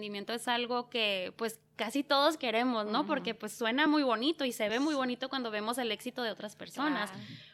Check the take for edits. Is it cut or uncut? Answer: uncut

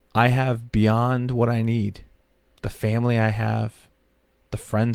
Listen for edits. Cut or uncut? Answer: uncut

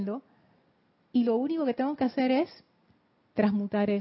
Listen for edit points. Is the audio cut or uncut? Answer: uncut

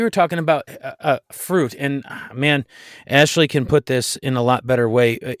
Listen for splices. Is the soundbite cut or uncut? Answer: uncut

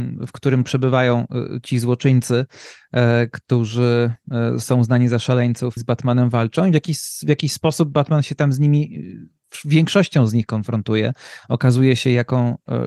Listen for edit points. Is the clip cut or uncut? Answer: cut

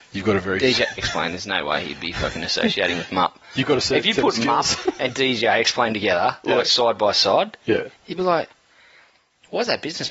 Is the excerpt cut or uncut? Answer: cut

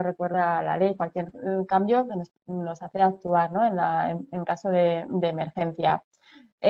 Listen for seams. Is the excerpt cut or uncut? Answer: uncut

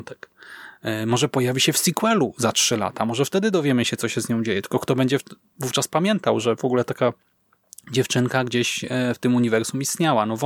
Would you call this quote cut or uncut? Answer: uncut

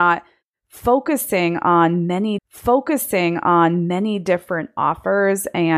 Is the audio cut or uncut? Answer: cut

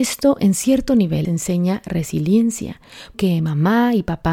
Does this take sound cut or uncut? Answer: cut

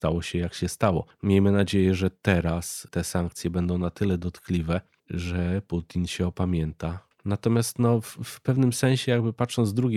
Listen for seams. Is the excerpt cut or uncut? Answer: uncut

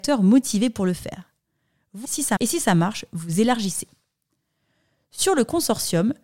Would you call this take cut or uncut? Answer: cut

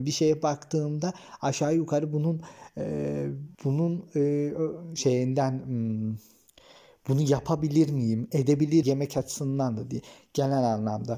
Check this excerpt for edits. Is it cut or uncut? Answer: cut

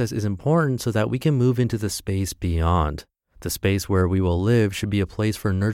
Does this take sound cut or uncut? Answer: uncut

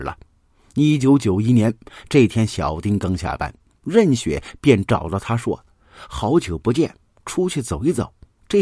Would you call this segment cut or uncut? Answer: uncut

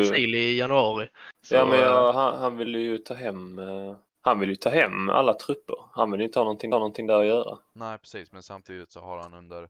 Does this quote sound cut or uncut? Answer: cut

